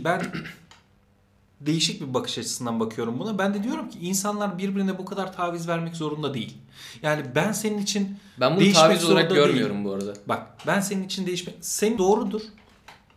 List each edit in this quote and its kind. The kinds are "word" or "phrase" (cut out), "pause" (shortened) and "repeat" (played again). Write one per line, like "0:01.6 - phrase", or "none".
0:12.0 - word